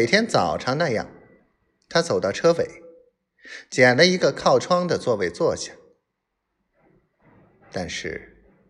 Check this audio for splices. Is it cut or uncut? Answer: uncut